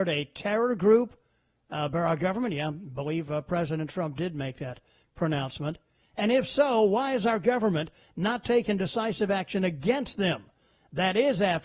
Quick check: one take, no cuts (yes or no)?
yes